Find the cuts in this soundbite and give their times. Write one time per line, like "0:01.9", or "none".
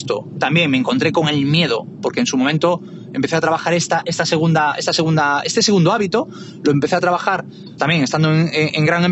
0:07.8